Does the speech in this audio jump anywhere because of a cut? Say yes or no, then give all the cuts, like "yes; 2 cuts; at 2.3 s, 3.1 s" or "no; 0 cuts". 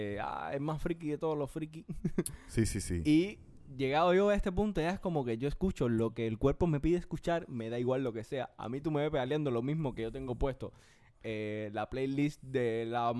no; 0 cuts